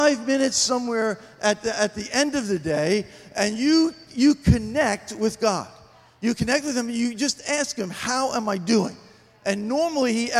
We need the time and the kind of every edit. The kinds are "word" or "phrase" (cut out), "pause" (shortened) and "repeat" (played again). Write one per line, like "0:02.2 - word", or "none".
none